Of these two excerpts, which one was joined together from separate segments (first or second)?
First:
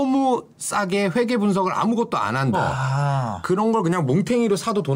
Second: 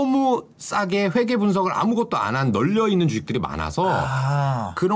first